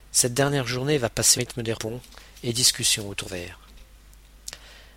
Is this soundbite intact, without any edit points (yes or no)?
no